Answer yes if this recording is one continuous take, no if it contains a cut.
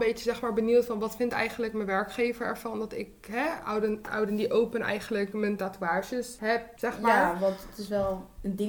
yes